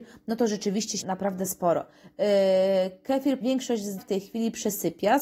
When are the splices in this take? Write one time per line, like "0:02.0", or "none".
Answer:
0:01.0
0:03.4
0:04.0